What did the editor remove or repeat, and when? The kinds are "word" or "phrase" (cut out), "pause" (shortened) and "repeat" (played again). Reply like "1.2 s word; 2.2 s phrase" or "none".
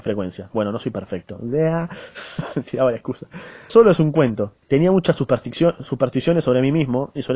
3.7 s word; 4.6 s pause